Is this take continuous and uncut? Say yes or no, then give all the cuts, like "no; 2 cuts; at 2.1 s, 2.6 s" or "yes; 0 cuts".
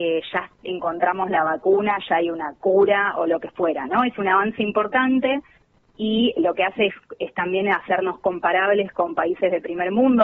no; 1 cut; at 6.4 s